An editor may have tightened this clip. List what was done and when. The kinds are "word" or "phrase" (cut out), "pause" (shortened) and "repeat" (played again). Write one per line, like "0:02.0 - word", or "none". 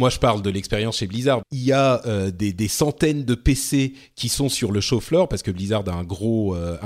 0:01.4 - word